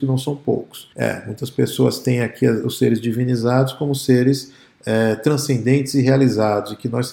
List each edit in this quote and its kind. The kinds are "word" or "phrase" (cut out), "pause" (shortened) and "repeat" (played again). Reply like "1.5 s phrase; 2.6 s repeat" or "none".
0.9 s pause